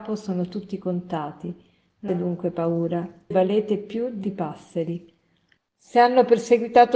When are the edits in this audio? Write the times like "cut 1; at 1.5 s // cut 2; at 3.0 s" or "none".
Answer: cut 1; at 2.1 s // cut 2; at 3.3 s // cut 3; at 4.2 s

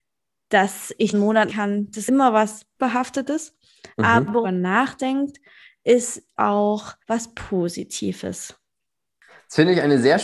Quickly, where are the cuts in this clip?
cut 1; at 1.1 s // cut 2; at 1.5 s // cut 3; at 2.1 s // cut 4; at 2.8 s // cut 5; at 4.4 s // cut 6; at 6.4 s // cut 7; at 7.0 s

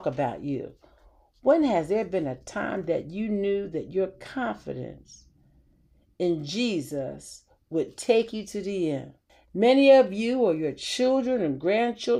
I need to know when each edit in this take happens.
none

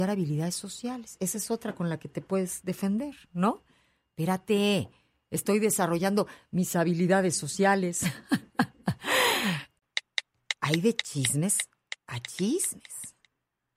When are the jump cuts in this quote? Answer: none

